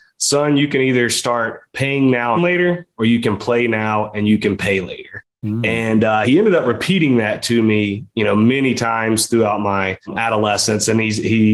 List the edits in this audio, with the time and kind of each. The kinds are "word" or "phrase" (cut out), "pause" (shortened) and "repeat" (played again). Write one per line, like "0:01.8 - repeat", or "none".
0:02.3 - phrase
0:05.3 - pause
0:06.2 - word